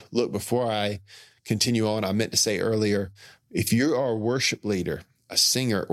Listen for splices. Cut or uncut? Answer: uncut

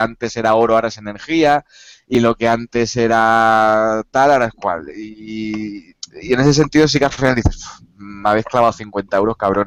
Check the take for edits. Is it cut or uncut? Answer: uncut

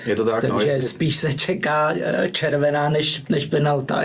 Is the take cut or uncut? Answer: uncut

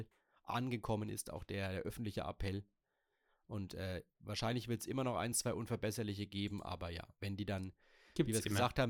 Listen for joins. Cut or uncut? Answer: uncut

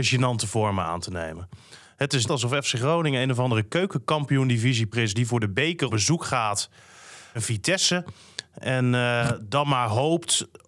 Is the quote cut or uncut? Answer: cut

